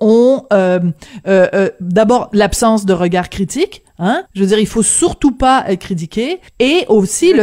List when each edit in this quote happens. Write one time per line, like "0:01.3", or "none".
0:04.3
0:06.5